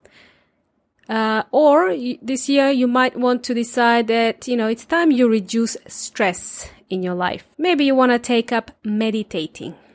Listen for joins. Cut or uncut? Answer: cut